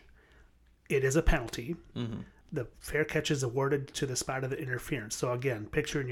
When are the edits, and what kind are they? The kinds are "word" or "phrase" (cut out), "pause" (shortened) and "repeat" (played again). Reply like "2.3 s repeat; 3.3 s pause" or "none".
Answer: none